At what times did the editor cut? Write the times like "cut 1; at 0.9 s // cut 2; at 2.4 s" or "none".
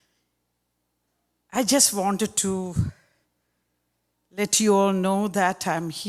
none